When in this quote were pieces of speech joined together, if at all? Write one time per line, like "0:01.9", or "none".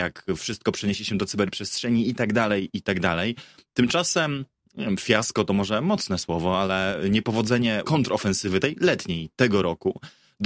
0:07.8